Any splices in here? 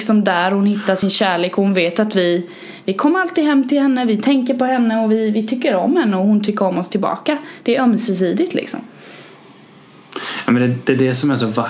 no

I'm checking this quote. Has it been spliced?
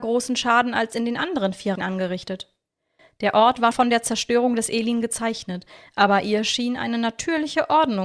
yes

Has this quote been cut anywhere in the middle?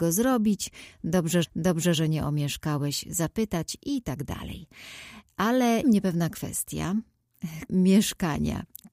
yes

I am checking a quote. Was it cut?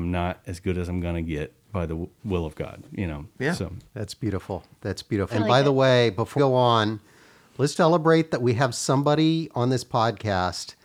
yes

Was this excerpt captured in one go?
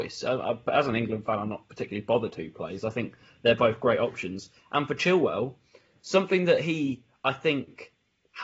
yes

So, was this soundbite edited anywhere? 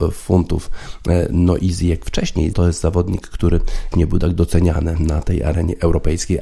yes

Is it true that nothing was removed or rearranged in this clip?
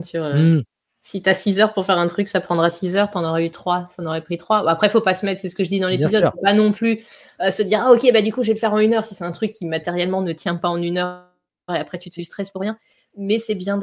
no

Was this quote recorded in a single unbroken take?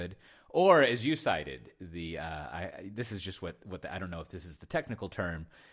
yes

